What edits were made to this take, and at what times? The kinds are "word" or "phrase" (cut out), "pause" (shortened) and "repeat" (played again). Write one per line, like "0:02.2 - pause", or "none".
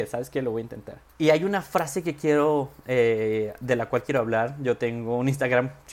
0:01.1 - pause